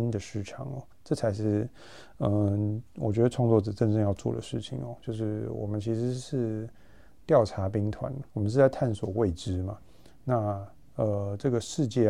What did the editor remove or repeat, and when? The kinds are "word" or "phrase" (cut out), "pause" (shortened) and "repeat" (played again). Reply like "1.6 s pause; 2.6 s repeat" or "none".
2.9 s pause; 8.3 s pause